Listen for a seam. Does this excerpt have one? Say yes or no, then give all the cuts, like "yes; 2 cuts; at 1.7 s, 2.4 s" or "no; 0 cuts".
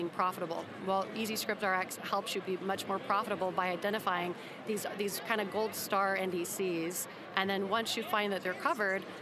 no; 0 cuts